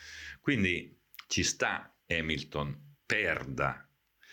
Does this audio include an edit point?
yes; 1 cut; at 2.0 s

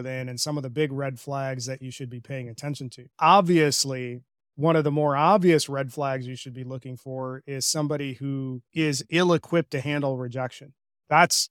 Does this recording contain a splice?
yes; 2 cuts; at 3.1 s, 8.7 s

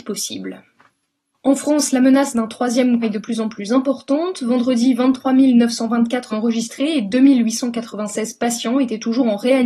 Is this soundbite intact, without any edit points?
no; 2 cuts; at 3.0 s, 6.3 s

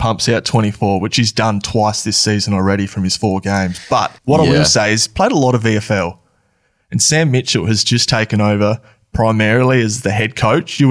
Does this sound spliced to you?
yes; 1 cut; at 4.2 s

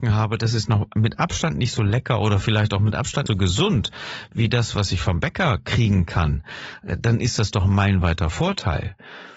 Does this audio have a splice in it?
yes; 1 cut; at 3.3 s

